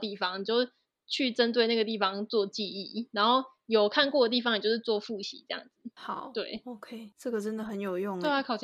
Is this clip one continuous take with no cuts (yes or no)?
yes